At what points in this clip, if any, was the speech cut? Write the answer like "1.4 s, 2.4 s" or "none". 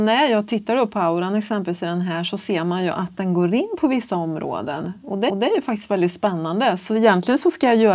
5.3 s

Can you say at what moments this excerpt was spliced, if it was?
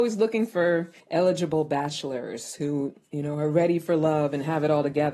1.0 s, 3.0 s

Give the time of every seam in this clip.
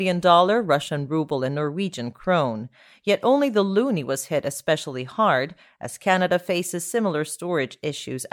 none

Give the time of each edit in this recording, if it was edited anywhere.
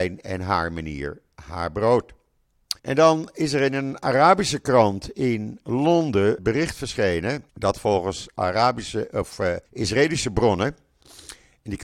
2.8 s, 6.4 s, 7.5 s, 9.7 s

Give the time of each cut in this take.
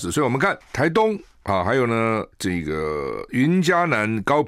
2.3 s

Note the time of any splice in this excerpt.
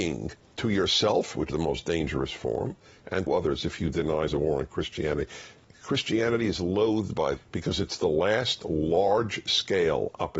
1.5 s, 3.3 s, 4.3 s, 7.4 s

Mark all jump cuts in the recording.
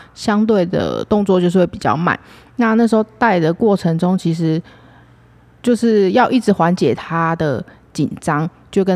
none

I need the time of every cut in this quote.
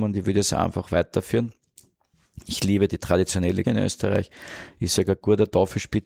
3.6 s

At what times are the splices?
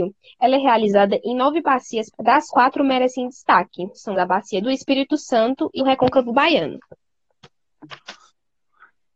2.1 s, 2.5 s, 4.1 s, 4.6 s, 5.8 s

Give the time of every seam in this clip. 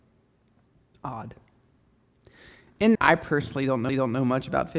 2.9 s, 3.9 s

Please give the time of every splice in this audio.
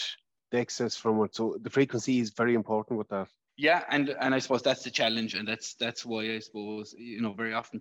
3.5 s

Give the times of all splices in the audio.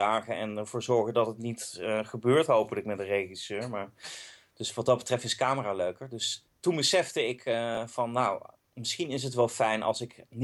none

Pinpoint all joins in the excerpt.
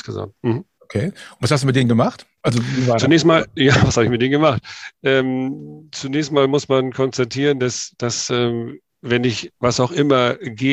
none

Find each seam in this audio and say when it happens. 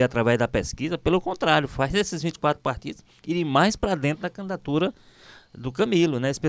none

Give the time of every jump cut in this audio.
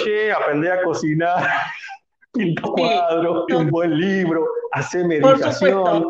2.6 s, 3.5 s

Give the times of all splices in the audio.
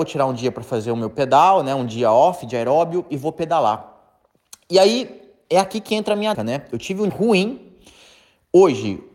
6.3 s, 7.1 s

